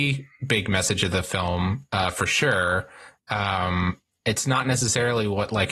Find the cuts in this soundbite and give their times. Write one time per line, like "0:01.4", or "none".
none